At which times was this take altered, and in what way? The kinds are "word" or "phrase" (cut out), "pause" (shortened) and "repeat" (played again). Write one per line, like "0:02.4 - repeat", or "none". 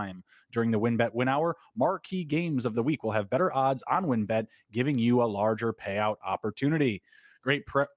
none

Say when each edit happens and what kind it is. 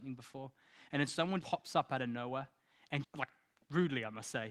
0:01.4 - word
0:03.0 - word

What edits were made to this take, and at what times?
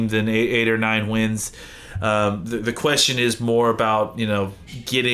none

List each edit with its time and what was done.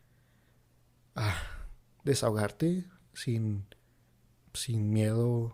none

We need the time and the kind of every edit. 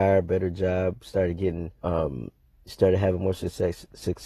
0:01.8 - pause

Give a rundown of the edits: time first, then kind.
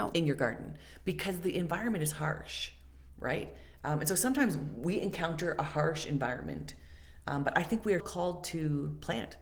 0:08.0 - word

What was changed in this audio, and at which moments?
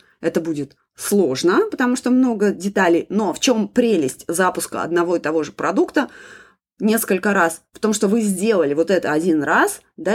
none

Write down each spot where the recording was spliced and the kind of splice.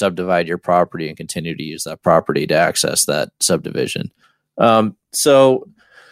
0:04.2 - pause

